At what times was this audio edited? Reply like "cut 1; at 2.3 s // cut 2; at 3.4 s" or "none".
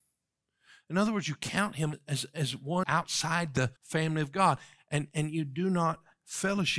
cut 1; at 1.9 s // cut 2; at 2.8 s // cut 3; at 3.8 s